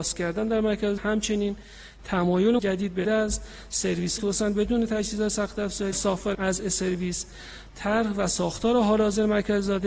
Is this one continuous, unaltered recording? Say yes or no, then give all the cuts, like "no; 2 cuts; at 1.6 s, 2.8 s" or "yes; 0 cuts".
no; 6 cuts; at 1.0 s, 2.6 s, 3.0 s, 4.2 s, 5.9 s, 6.3 s